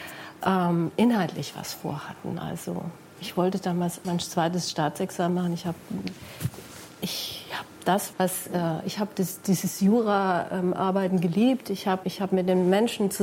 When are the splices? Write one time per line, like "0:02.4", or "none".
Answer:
0:04.0
0:08.1
0:12.0